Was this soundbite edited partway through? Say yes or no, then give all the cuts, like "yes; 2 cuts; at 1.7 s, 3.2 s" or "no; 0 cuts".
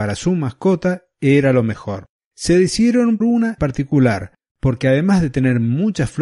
yes; 3 cuts; at 2.2 s, 3.2 s, 3.6 s